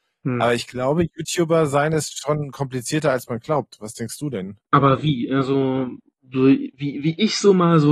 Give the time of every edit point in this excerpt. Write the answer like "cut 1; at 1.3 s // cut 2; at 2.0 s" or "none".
none